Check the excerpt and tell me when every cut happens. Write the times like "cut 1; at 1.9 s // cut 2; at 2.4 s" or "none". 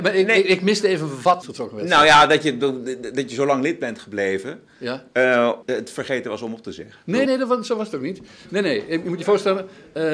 cut 1; at 1.4 s // cut 2; at 5.6 s // cut 3; at 7.3 s